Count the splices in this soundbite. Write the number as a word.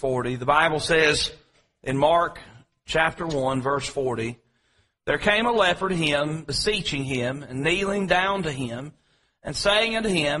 zero